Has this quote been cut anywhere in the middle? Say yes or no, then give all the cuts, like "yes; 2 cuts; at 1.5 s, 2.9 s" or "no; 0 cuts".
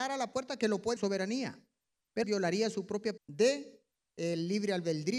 yes; 3 cuts; at 1.0 s, 2.2 s, 3.2 s